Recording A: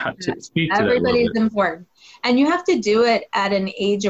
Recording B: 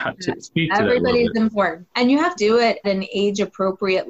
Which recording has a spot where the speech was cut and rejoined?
B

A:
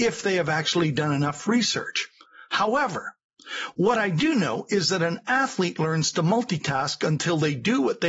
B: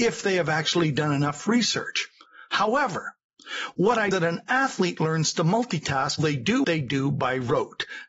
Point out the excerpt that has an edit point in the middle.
B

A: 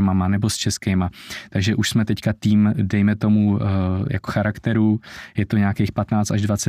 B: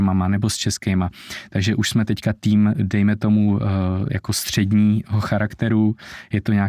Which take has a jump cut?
A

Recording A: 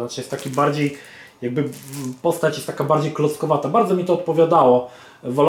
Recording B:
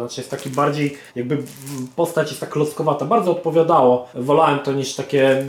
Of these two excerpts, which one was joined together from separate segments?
B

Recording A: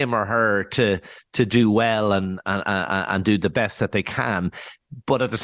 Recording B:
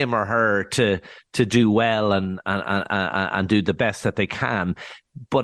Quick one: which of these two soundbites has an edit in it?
A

